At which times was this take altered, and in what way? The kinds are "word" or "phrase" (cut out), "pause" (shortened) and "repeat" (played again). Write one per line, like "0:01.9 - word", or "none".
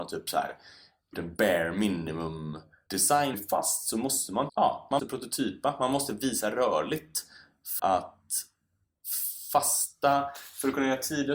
0:01.1 - word
0:03.3 - word
0:04.5 - word
0:05.0 - word
0:07.8 - word